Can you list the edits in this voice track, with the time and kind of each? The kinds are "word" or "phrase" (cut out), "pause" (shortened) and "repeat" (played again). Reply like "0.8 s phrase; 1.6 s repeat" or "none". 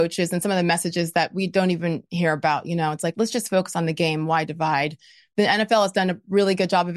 3.1 s word